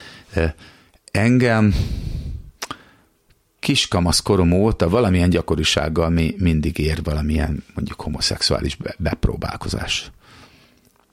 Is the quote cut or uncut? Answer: uncut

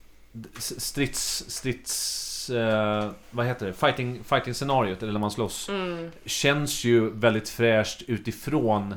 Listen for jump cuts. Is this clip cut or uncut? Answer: cut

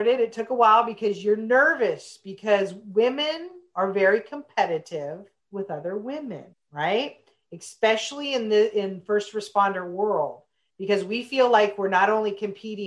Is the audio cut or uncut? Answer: cut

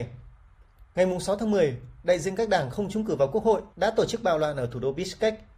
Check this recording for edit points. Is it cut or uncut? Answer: cut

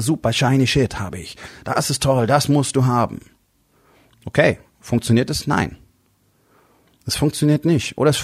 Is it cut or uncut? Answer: uncut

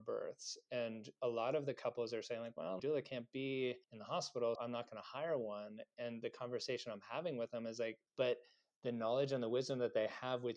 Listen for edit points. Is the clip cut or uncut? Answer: cut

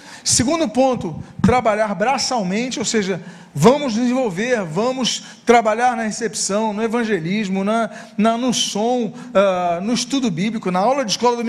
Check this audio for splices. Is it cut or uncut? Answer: uncut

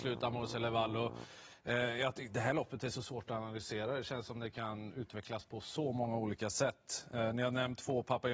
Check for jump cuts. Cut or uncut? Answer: uncut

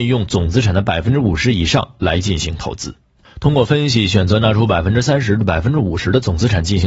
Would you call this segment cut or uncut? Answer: uncut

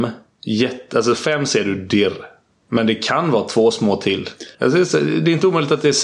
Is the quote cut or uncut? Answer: cut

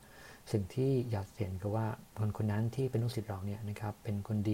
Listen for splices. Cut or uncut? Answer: cut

